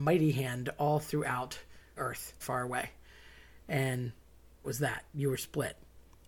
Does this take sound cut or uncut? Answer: cut